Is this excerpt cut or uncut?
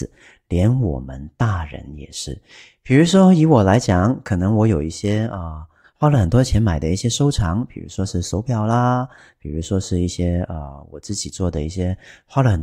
uncut